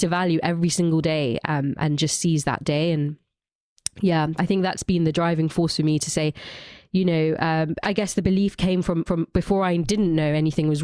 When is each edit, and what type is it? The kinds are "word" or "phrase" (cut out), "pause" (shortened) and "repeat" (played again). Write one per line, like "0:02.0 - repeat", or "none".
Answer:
0:04.4 - word
0:07.8 - word
0:09.1 - repeat